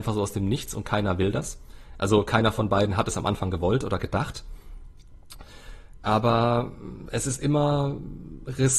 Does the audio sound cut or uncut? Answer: uncut